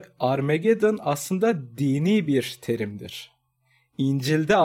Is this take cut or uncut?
uncut